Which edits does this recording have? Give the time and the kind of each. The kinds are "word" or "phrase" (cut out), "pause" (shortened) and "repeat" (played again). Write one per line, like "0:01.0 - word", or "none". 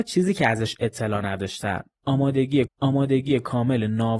0:02.7 - repeat